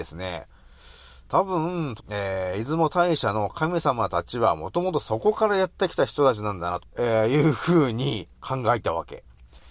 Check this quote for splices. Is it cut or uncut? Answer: cut